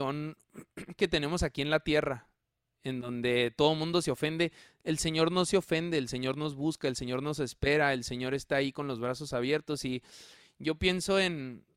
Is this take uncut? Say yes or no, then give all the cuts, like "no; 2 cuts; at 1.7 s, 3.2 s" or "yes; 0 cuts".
yes; 0 cuts